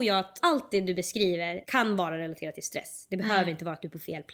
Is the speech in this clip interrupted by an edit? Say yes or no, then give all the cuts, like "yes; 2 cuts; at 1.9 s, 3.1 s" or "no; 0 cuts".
no; 0 cuts